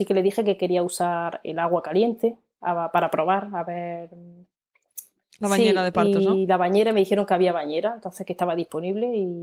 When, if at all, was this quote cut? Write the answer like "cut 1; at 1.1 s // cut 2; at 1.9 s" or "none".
none